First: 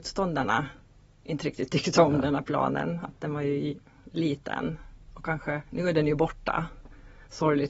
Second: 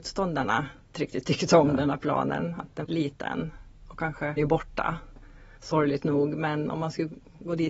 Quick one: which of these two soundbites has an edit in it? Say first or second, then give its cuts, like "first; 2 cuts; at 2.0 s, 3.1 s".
second; 3 cuts; at 0.9 s, 2.8 s, 4.4 s